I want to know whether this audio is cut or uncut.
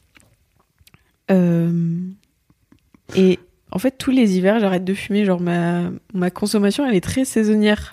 uncut